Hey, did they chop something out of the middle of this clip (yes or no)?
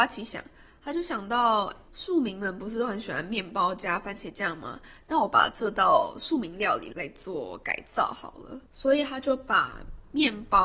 yes